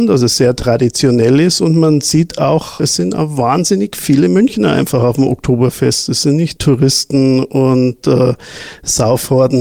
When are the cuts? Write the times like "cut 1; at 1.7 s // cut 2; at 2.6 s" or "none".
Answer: cut 1; at 6.6 s